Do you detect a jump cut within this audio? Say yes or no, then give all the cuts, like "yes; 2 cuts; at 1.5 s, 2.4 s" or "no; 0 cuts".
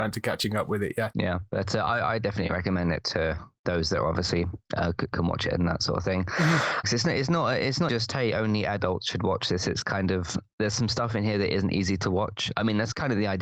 yes; 2 cuts; at 6.8 s, 7.9 s